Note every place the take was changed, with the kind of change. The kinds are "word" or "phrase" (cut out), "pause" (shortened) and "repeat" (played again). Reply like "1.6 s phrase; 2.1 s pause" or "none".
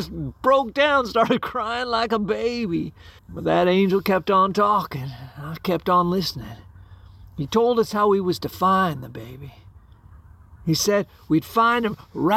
3.2 s pause